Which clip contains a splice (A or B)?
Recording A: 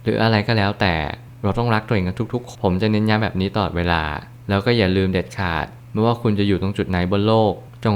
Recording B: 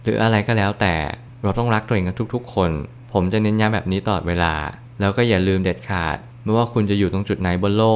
A